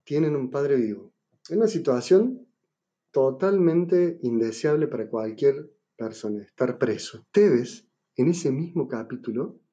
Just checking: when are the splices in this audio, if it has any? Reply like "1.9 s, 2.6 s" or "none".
7.3 s